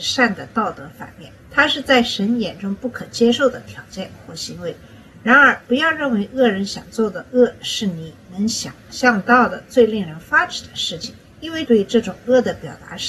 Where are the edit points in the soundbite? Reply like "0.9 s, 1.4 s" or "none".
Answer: 1.4 s, 11.3 s